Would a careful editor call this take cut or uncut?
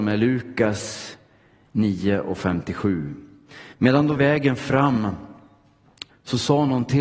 cut